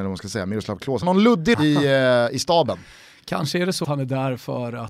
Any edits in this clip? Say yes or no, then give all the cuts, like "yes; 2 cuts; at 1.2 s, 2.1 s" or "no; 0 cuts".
yes; 3 cuts; at 1.0 s, 1.5 s, 3.8 s